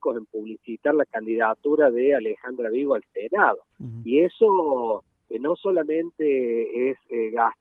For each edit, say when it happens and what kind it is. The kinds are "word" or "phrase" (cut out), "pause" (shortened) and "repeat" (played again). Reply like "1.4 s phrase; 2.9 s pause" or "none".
none